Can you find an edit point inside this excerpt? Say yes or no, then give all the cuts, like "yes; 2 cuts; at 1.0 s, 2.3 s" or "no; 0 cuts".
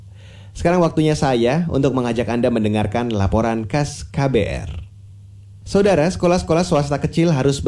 no; 0 cuts